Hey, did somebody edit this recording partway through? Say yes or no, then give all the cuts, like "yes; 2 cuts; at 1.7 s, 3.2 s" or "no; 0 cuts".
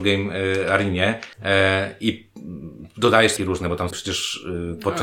yes; 3 cuts; at 1.3 s, 3.4 s, 3.9 s